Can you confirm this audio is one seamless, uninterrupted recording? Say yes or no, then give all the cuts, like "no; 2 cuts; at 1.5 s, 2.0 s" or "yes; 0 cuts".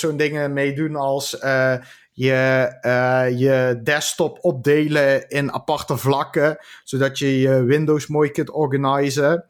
yes; 0 cuts